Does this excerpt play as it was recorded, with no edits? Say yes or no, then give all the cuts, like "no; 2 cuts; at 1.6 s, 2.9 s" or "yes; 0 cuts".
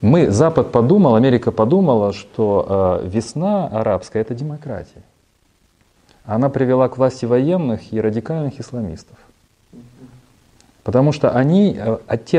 yes; 0 cuts